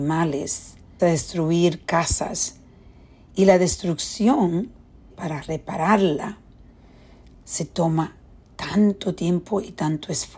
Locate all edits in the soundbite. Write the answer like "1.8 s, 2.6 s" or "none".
1.0 s, 5.1 s

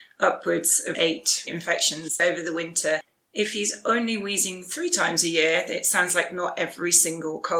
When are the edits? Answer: none

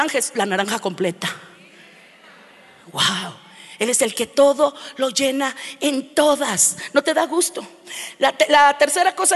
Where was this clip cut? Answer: none

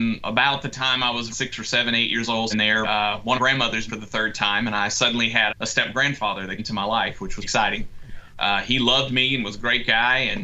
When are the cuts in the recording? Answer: 1.3 s, 2.5 s, 2.8 s, 3.4 s, 3.9 s, 5.5 s, 6.6 s, 7.4 s

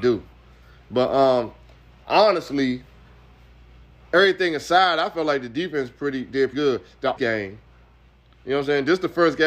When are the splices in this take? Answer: 6.5 s, 7.2 s

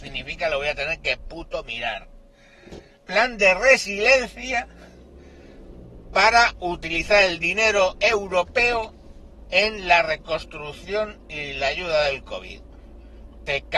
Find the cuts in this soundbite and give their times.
none

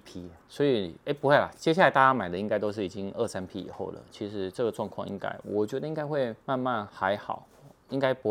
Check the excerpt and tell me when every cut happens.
6.4 s

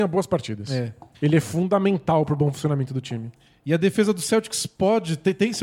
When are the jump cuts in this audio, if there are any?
none

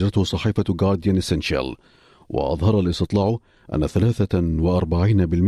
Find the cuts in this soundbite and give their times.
none

